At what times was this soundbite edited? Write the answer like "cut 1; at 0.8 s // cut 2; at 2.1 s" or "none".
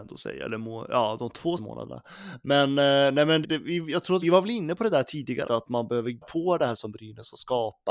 cut 1; at 1.6 s // cut 2; at 3.4 s // cut 3; at 4.2 s // cut 4; at 5.4 s // cut 5; at 6.2 s // cut 6; at 6.7 s